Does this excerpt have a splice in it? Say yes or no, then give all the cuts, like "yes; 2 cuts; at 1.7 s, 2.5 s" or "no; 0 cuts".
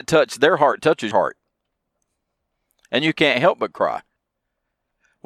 yes; 1 cut; at 1.1 s